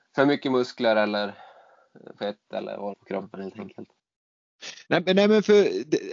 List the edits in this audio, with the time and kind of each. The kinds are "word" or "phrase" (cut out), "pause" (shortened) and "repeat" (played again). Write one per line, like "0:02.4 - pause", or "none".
0:02.9 - phrase